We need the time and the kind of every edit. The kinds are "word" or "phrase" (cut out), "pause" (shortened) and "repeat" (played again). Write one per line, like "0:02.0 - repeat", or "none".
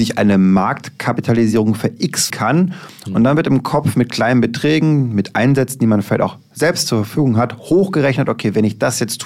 0:02.3 - word